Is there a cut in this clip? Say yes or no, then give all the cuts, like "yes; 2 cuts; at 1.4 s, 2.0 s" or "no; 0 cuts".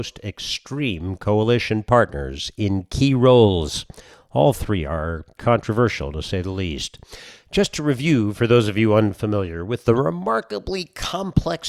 yes; 1 cut; at 5.4 s